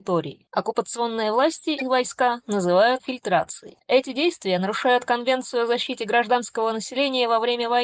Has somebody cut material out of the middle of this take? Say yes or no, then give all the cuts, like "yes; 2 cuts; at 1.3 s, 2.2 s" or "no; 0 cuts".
yes; 1 cut; at 3.0 s